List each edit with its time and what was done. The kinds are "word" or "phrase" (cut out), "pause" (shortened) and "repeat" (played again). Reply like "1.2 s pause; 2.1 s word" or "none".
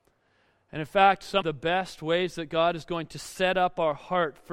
1.4 s word